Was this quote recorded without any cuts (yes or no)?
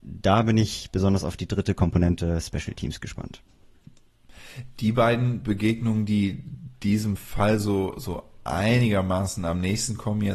yes